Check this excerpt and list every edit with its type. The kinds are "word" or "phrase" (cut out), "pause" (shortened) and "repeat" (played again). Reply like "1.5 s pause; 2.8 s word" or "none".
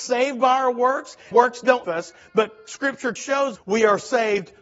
1.3 s word; 1.8 s word; 3.2 s word; 3.6 s word